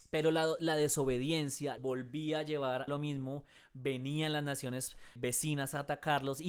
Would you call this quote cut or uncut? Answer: cut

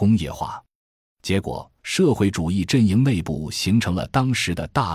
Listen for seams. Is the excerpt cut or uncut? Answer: cut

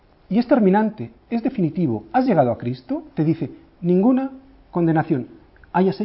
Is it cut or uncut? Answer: uncut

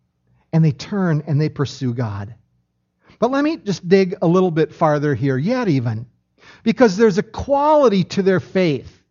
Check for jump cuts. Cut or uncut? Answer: uncut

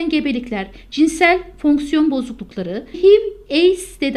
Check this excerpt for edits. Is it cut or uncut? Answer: cut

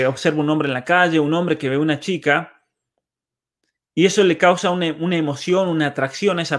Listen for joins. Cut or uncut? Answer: uncut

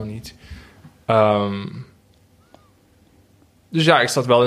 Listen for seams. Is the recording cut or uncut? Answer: uncut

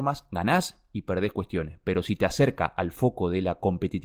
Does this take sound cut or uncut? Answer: uncut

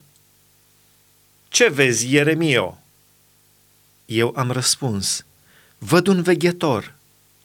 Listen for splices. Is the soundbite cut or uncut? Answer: uncut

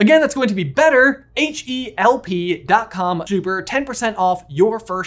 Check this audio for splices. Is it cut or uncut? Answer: cut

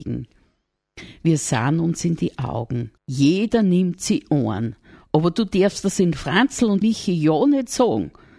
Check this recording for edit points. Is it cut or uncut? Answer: cut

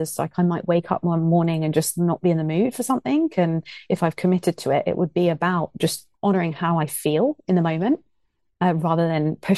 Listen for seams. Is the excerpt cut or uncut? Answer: cut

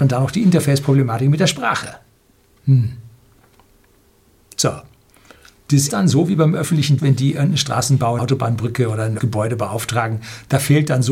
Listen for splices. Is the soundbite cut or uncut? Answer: cut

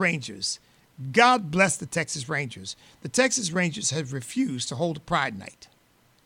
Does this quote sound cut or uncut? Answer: uncut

